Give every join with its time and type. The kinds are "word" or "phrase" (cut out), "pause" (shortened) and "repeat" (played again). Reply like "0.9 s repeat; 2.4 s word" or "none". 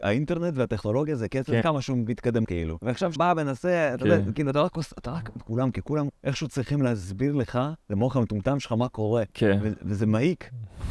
1.6 s word; 2.4 s word; 3.2 s word; 5.4 s word; 6.2 s pause; 7.8 s pause